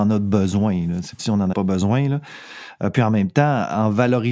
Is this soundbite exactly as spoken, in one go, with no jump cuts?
no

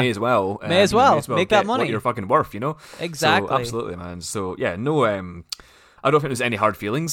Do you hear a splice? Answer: no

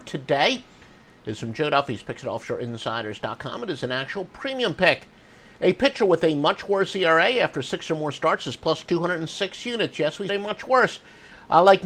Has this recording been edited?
yes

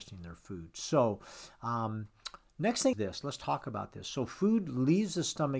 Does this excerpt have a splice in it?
yes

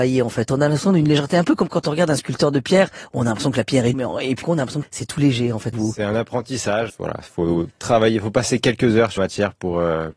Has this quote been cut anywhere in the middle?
yes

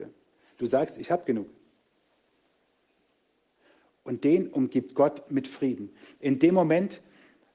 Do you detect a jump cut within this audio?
no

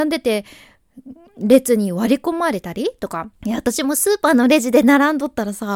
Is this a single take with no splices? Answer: no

